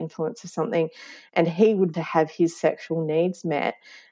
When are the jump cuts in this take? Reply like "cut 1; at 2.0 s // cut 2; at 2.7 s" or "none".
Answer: cut 1; at 1.9 s

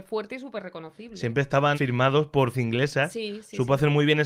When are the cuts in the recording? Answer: cut 1; at 1.7 s // cut 2; at 2.5 s

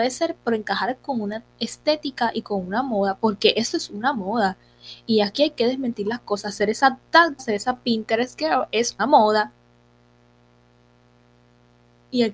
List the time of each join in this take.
cut 1; at 7.4 s // cut 2; at 9.0 s

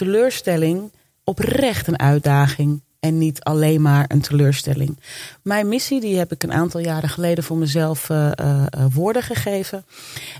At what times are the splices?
none

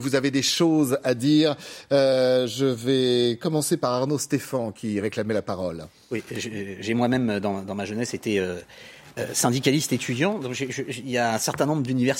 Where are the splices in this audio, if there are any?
none

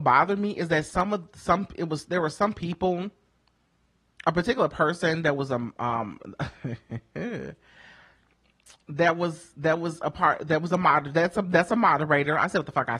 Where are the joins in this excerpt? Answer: none

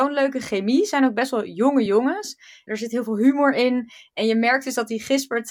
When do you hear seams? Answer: none

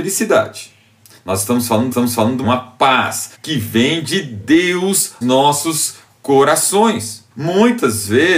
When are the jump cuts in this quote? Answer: cut 1; at 1.9 s // cut 2; at 2.4 s // cut 3; at 3.3 s // cut 4; at 5.2 s // cut 5; at 7.3 s

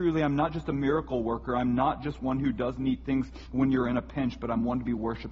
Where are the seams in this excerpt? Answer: none

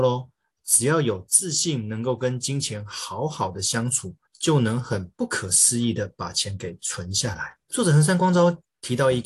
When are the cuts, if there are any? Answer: cut 1; at 4.3 s // cut 2; at 7.6 s

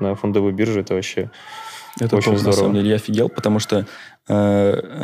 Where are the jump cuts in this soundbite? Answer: none

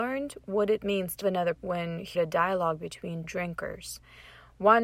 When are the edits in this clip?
cut 1; at 1.2 s // cut 2; at 1.6 s // cut 3; at 2.2 s // cut 4; at 3.2 s

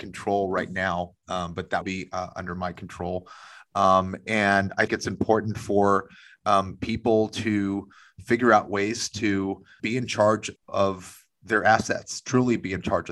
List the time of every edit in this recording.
cut 1; at 1.8 s // cut 2; at 4.9 s // cut 3; at 9.8 s // cut 4; at 10.6 s

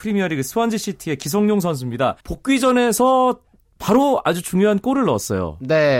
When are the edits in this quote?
cut 1; at 2.2 s

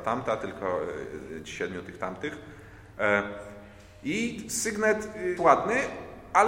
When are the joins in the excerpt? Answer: cut 1; at 5.4 s

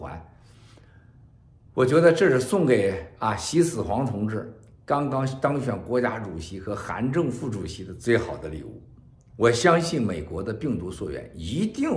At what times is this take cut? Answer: cut 1; at 9.3 s

